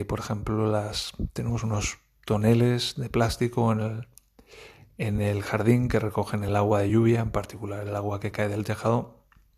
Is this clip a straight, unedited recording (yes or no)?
yes